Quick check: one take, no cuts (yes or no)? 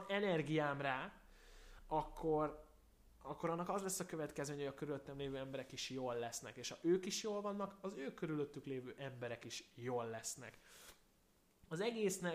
yes